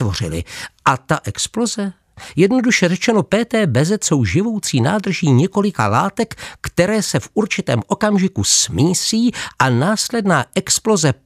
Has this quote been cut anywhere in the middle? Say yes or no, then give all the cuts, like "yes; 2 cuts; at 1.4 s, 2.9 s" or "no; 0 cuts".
no; 0 cuts